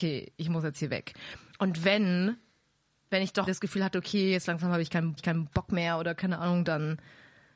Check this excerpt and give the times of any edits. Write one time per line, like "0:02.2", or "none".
0:03.5
0:05.2